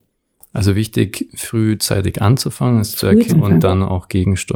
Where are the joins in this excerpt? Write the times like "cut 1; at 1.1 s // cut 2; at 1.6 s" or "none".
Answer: cut 1; at 3.3 s